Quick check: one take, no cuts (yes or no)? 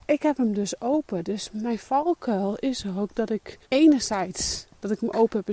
no